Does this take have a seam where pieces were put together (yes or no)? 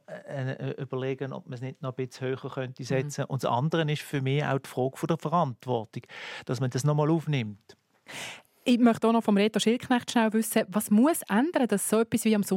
no